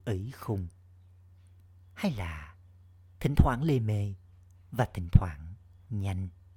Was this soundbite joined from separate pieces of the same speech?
no; 0 cuts

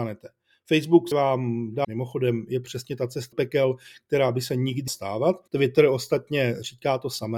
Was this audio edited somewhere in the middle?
yes; 5 cuts; at 1.1 s, 1.8 s, 3.3 s, 4.9 s, 5.5 s

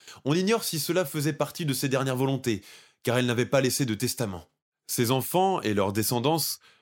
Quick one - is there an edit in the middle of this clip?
no; 0 cuts

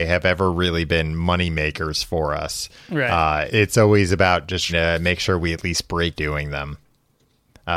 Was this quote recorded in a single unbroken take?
no; 3 cuts; at 3.5 s, 4.7 s, 6.1 s

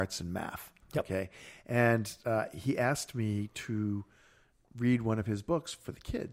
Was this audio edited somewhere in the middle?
no; 0 cuts

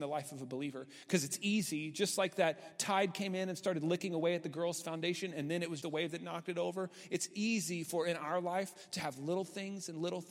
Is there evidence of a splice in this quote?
yes; 1 cut; at 5.8 s

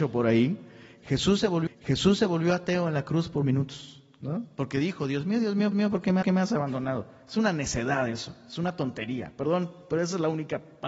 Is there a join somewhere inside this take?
yes; 4 cuts; at 1.7 s, 3.4 s, 5.7 s, 6.2 s

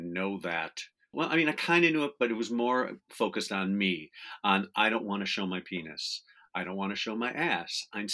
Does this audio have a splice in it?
yes; 1 cut; at 1.1 s

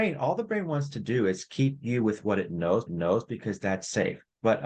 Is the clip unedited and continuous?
no; 1 cut; at 2.9 s

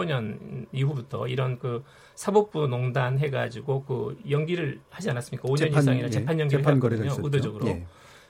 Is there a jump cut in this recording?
no; 0 cuts

